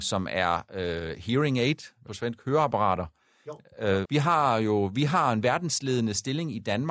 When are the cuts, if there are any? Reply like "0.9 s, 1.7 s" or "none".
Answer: 2.1 s, 4.0 s